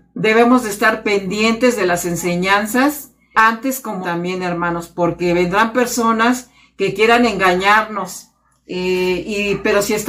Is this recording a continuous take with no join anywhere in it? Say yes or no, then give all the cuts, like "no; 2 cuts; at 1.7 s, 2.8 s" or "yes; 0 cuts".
no; 2 cuts; at 3.3 s, 4.0 s